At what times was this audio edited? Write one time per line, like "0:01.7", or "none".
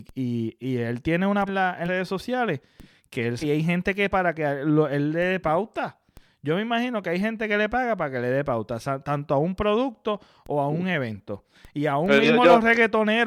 0:01.5
0:01.9
0:03.4
0:04.1